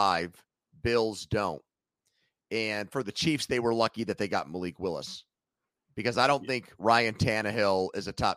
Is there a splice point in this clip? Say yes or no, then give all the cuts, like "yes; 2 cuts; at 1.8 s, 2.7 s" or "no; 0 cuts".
no; 0 cuts